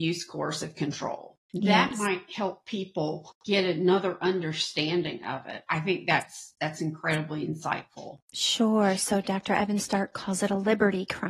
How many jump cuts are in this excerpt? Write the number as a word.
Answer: two